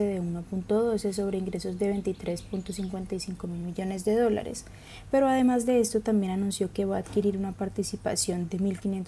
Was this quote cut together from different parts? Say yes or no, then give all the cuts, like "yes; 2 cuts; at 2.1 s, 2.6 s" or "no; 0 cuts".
no; 0 cuts